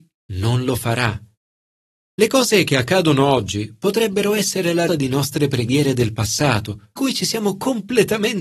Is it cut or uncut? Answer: cut